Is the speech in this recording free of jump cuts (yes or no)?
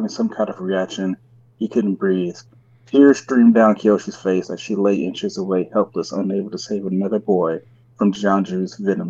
yes